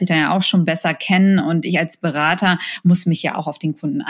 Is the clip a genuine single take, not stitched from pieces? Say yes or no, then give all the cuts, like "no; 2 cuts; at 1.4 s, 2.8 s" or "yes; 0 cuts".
yes; 0 cuts